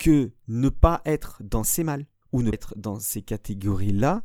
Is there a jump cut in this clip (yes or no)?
yes